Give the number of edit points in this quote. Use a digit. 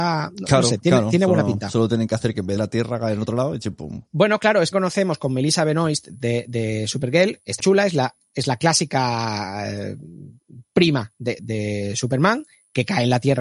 5